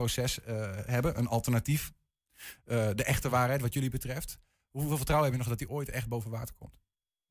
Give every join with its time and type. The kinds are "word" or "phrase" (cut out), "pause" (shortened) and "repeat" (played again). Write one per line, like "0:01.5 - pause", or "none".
none